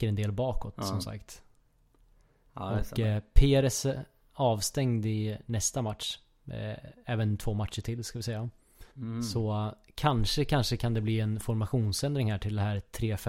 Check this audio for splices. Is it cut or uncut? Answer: cut